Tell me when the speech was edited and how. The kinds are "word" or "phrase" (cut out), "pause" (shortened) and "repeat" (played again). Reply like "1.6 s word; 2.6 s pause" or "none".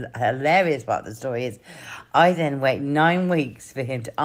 none

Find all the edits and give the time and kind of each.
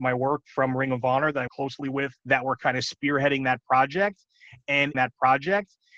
1.5 s word; 2.2 s pause; 4.9 s repeat

